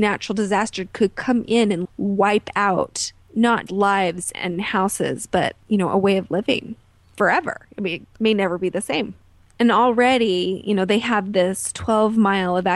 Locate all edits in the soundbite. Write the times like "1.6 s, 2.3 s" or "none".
1.8 s, 3.7 s, 4.3 s